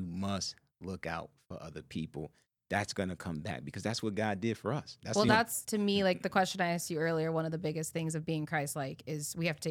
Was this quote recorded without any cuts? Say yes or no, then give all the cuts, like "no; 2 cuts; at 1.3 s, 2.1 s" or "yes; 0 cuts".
yes; 0 cuts